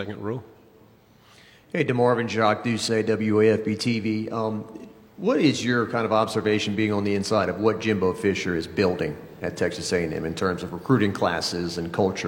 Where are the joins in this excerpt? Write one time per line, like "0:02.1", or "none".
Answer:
none